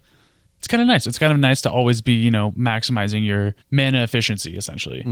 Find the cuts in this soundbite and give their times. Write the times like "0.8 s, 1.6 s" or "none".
3.6 s

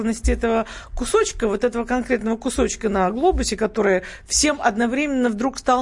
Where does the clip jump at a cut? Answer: none

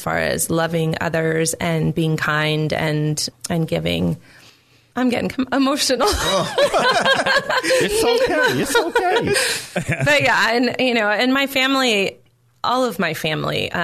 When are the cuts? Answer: 3.3 s, 4.9 s

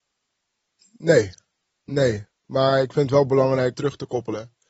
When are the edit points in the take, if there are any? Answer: 3.7 s

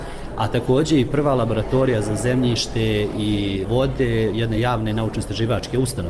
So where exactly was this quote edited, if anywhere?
none

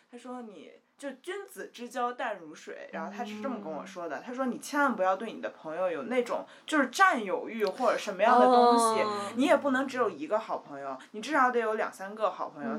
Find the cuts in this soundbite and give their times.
none

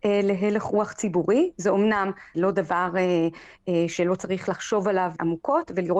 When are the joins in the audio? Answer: none

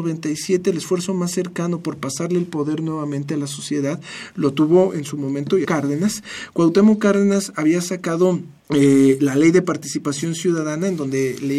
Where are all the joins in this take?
5.6 s, 8.6 s

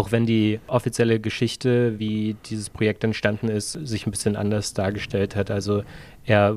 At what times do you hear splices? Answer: none

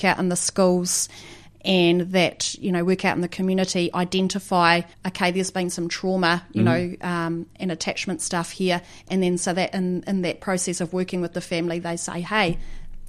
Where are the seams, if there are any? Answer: 4.9 s

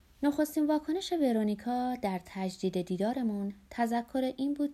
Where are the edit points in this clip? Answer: none

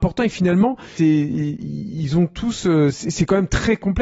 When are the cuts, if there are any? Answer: 1.0 s

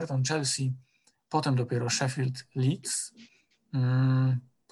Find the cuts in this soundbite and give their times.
none

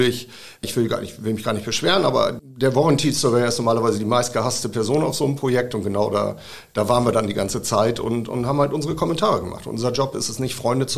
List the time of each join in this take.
none

